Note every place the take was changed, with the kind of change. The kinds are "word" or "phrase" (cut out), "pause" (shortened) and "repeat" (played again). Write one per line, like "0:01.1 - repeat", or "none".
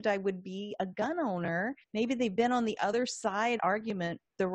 0:01.8 - pause
0:03.6 - phrase